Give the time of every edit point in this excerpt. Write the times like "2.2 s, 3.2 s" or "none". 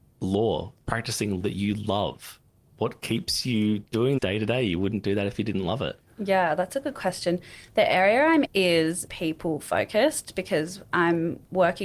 1.4 s, 4.2 s, 8.5 s, 9.1 s